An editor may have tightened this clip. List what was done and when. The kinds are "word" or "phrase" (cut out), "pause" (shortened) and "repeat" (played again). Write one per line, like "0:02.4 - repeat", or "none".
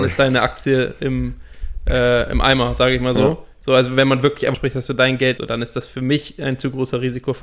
0:04.5 - phrase
0:05.4 - phrase